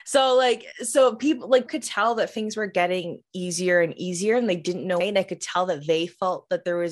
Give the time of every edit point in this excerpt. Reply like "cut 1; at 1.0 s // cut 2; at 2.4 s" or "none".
cut 1; at 1.7 s // cut 2; at 5.0 s